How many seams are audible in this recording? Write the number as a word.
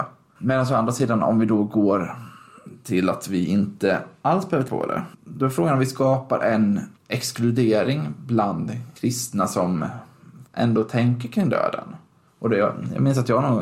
five